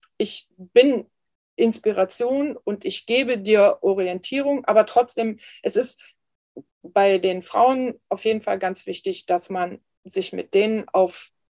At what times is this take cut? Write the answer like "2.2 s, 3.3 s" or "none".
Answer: none